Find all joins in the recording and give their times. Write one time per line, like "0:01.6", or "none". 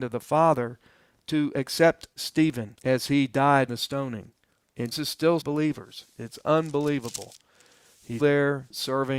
0:03.7
0:04.9
0:05.4
0:08.2